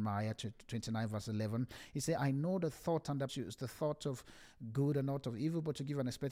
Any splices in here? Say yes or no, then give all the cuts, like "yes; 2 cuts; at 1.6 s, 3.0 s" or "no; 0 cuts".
yes; 1 cut; at 3.3 s